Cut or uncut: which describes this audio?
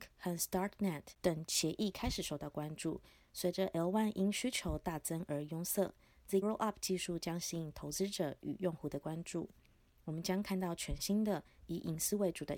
cut